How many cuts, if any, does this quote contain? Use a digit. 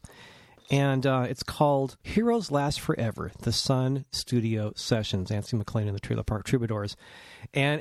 1